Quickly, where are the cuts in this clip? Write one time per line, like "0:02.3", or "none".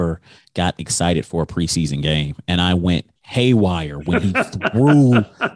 0:03.2